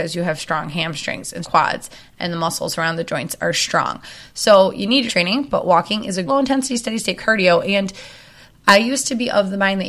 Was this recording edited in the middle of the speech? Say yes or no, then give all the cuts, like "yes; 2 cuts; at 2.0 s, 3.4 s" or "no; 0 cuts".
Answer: yes; 3 cuts; at 1.4 s, 5.1 s, 6.3 s